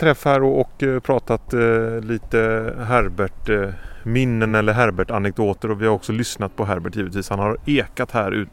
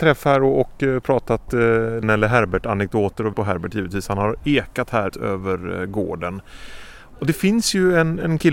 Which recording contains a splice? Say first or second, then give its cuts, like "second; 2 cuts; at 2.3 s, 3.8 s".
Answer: second; 3 cuts; at 2.0 s, 3.3 s, 5.1 s